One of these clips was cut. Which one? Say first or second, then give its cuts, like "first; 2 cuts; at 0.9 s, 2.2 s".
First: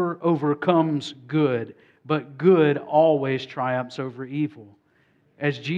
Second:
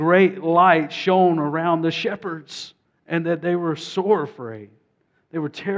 second; 1 cut; at 2.8 s